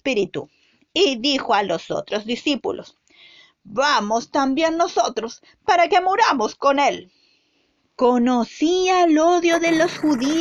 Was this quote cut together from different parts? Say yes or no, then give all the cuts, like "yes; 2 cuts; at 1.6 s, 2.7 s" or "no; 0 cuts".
no; 0 cuts